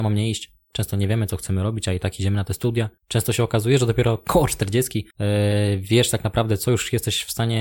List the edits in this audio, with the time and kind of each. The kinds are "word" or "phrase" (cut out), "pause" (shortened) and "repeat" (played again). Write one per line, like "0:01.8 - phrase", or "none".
0:03.0 - pause
0:05.1 - pause